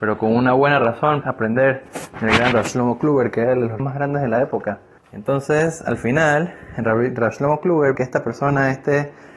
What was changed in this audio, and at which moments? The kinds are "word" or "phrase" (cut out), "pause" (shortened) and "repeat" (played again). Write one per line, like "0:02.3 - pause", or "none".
0:01.2 - phrase
0:02.5 - word
0:03.8 - word
0:05.0 - pause
0:07.9 - word